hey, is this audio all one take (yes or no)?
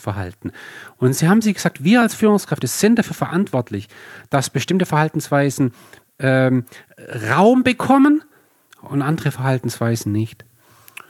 yes